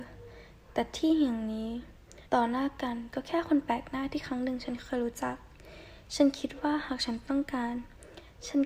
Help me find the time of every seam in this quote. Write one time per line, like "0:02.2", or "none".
0:02.3